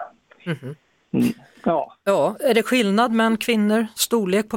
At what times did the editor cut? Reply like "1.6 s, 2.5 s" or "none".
none